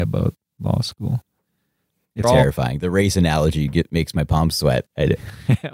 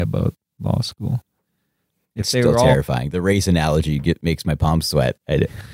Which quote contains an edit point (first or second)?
first